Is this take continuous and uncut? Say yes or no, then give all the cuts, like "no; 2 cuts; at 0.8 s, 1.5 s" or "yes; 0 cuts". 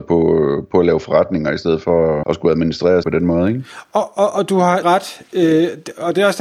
no; 3 cuts; at 2.2 s, 3.0 s, 4.8 s